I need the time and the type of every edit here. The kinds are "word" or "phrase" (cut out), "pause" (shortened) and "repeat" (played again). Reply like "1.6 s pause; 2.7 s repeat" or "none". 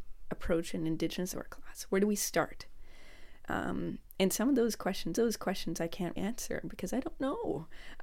1.3 s phrase; 5.2 s repeat; 6.2 s word